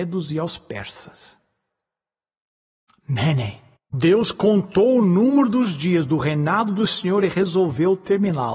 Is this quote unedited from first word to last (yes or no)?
no